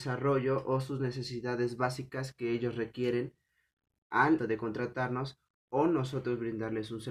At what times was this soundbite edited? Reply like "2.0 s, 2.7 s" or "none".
4.4 s